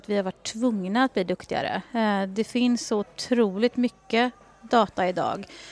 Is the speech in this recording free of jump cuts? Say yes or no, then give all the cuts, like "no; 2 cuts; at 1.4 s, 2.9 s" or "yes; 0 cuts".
yes; 0 cuts